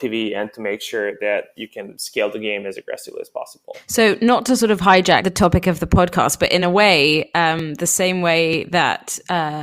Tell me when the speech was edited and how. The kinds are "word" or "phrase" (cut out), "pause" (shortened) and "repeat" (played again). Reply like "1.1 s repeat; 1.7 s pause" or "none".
none